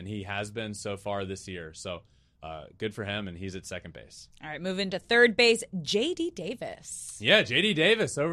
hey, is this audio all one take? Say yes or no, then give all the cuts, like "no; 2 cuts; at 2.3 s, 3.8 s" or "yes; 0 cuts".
yes; 0 cuts